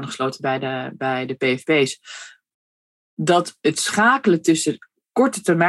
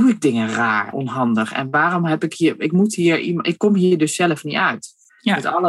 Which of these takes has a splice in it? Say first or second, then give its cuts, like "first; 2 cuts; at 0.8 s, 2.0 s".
second; 1 cut; at 0.9 s